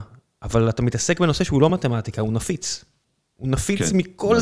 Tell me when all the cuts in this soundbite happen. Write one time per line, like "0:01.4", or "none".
none